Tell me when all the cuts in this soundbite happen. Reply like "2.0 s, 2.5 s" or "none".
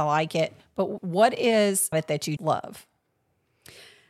1.0 s, 1.9 s, 2.4 s